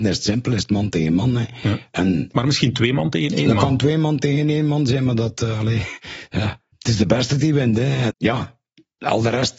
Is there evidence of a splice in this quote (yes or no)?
yes